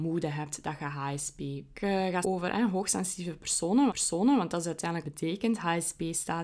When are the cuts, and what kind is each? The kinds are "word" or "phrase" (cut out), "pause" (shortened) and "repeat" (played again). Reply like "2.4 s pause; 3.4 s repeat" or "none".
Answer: 1.7 s word; 2.2 s word; 3.9 s repeat; 5.0 s phrase